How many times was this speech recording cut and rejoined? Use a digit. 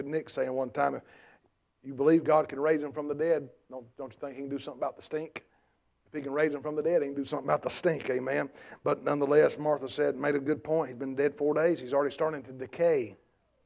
0